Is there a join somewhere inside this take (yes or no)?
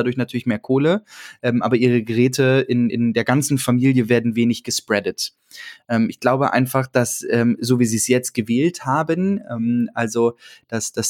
no